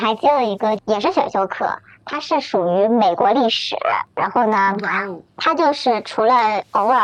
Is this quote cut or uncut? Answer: uncut